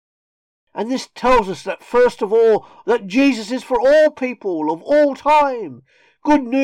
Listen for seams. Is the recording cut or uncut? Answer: uncut